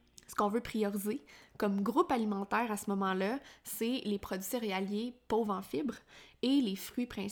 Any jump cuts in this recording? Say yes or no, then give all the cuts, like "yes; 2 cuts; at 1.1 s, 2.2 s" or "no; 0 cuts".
no; 0 cuts